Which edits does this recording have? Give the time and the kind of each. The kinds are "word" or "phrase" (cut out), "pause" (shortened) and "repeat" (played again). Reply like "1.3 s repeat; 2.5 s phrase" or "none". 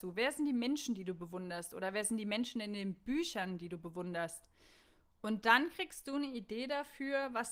none